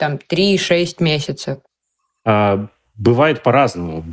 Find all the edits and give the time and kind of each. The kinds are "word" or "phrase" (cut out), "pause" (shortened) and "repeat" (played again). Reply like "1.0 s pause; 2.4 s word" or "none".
none